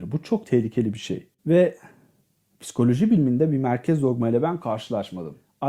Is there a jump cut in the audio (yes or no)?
no